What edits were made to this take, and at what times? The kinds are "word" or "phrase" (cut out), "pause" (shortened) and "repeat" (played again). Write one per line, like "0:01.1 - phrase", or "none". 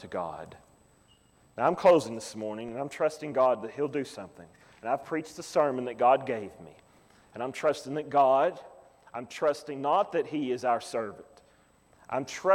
none